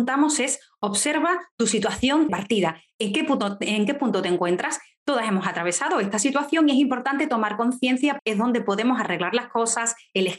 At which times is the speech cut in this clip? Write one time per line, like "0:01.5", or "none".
0:02.3
0:08.2